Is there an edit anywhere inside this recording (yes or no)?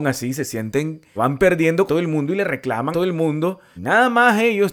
yes